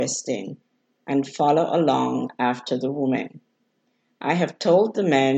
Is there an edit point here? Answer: no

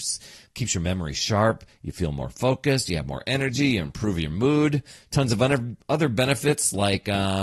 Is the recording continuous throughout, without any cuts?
yes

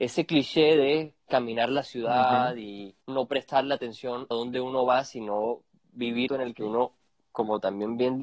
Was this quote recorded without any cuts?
no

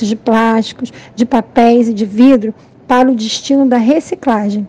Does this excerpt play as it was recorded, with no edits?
yes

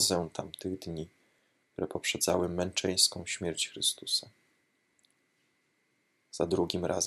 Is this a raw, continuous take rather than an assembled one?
yes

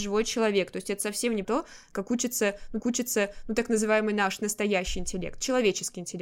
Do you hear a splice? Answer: yes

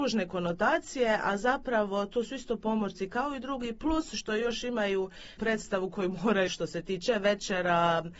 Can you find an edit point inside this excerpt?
yes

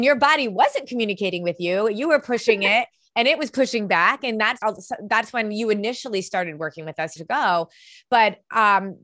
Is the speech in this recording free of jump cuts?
no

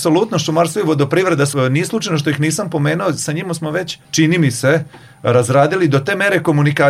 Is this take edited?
no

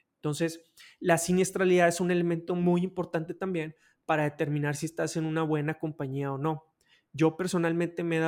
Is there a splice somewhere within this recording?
no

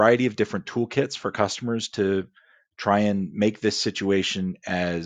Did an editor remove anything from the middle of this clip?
no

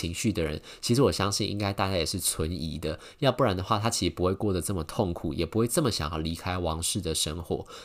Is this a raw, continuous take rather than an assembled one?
yes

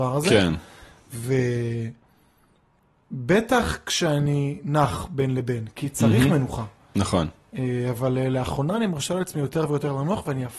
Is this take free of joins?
yes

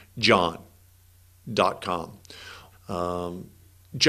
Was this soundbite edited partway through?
yes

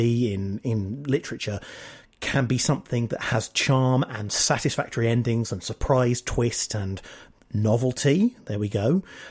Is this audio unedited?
yes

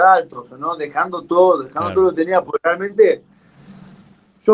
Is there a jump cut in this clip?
no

